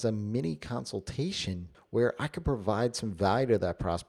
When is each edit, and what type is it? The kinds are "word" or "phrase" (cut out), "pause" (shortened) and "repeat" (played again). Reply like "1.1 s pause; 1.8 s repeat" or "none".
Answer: 1.7 s pause